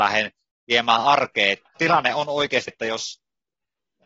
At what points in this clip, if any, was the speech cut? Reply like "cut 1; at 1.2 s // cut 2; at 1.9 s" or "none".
cut 1; at 1.8 s // cut 2; at 2.7 s